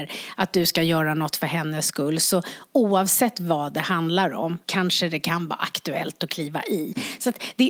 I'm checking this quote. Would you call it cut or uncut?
cut